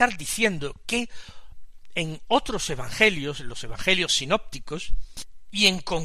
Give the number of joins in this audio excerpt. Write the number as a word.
zero